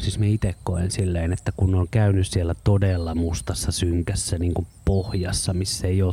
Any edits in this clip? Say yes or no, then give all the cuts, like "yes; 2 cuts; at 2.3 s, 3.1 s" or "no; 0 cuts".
no; 0 cuts